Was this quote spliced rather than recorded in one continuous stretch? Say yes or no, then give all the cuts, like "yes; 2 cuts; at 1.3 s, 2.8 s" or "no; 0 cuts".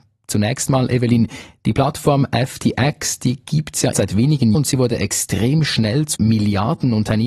yes; 3 cuts; at 3.9 s, 4.5 s, 6.1 s